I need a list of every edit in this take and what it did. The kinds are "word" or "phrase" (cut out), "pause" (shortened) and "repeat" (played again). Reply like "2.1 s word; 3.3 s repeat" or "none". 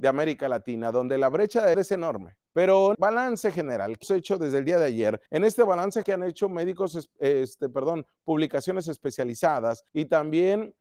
1.7 s word; 2.5 s pause; 2.9 s word; 4.0 s word; 5.3 s pause; 6.0 s word; 9.9 s pause